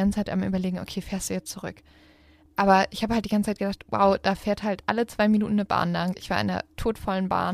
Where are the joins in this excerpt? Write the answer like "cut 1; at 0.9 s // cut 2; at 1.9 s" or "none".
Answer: none